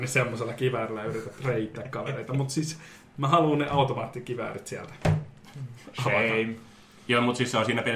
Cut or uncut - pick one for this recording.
uncut